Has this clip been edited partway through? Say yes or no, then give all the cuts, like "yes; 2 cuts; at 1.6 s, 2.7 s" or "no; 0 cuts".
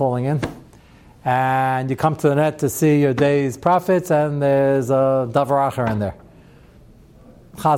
no; 0 cuts